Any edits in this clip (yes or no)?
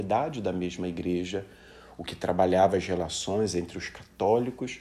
no